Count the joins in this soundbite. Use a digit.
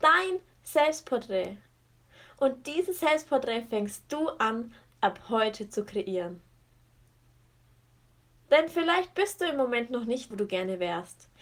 1